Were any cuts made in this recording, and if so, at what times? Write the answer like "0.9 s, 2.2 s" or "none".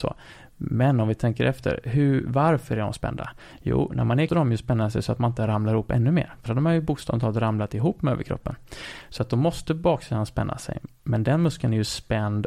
4.3 s, 6.5 s